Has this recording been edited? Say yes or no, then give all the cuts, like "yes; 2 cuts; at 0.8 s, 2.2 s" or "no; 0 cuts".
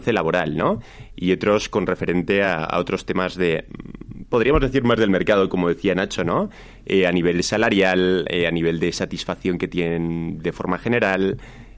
no; 0 cuts